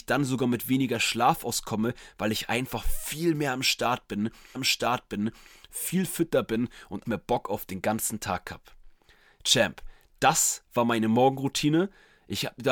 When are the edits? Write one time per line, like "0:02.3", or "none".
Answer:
0:04.5
0:07.0